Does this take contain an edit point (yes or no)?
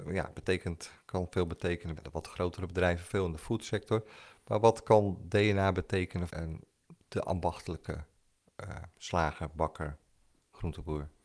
yes